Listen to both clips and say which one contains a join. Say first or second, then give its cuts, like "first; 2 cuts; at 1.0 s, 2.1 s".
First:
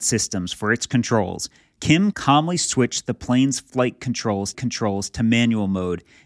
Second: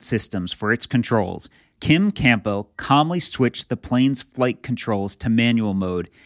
first; 2 cuts; at 2.1 s, 4.5 s